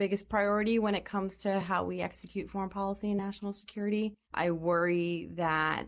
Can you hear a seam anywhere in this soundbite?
no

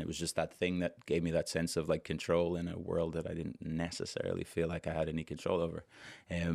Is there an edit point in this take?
no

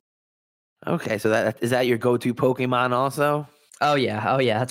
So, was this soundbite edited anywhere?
no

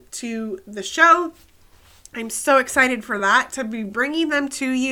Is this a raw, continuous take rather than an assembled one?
yes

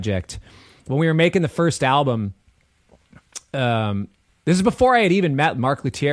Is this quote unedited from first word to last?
no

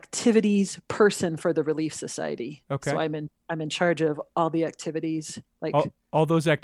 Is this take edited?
no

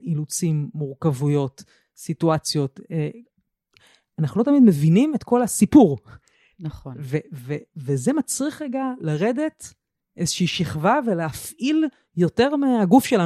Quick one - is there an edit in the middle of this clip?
no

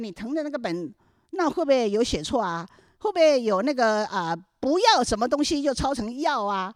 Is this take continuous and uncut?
yes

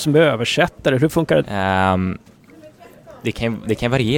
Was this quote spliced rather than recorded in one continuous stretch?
yes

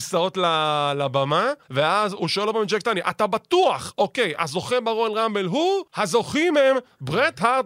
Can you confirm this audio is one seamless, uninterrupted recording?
no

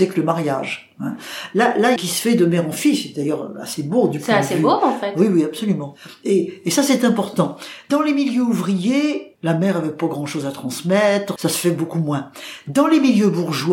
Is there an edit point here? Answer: yes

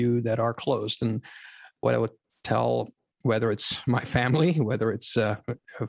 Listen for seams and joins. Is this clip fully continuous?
no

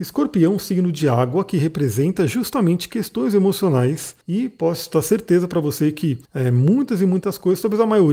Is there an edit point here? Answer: yes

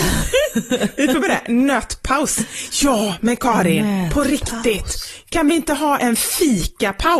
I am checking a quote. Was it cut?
yes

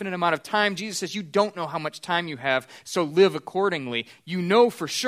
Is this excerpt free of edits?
yes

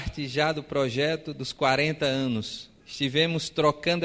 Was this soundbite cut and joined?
yes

